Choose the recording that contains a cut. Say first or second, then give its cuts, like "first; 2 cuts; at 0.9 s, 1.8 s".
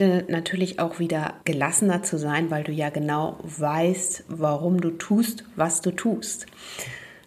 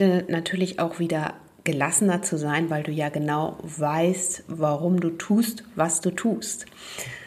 first; 1 cut; at 1.4 s